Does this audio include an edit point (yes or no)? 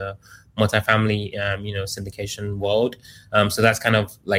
no